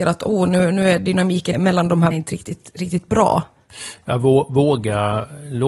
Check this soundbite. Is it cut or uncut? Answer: cut